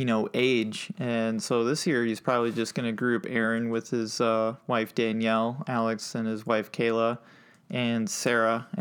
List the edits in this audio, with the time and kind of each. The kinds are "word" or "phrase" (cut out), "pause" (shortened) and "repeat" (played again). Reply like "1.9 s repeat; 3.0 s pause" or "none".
none